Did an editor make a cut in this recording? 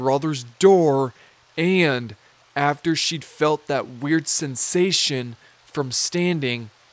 no; 0 cuts

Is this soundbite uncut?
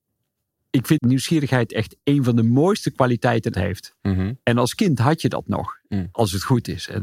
no; 2 cuts; at 1.0 s, 3.5 s

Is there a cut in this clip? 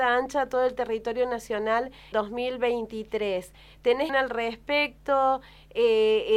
yes; 2 cuts; at 2.1 s, 4.1 s

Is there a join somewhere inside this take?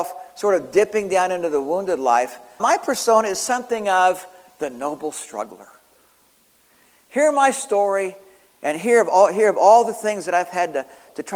yes; 1 cut; at 2.6 s

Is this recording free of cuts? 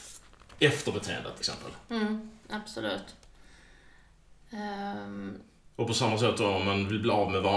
no; 3 cuts; at 1.4 s, 2.4 s, 5.7 s

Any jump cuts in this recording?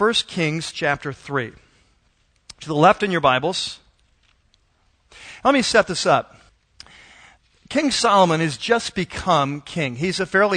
no; 0 cuts

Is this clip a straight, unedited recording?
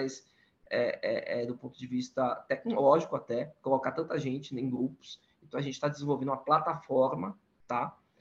yes; 0 cuts

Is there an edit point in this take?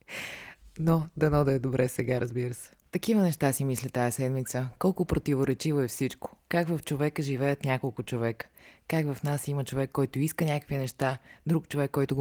no; 0 cuts

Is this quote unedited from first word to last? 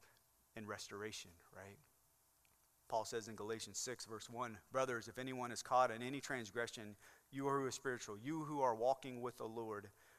yes; 0 cuts

